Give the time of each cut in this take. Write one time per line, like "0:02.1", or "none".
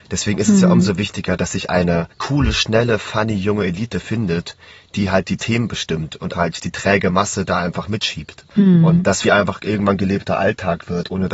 0:02.1
0:06.3
0:08.5
0:09.2